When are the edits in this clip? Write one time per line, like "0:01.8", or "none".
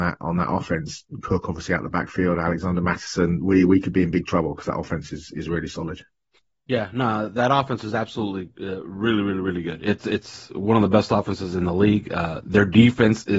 none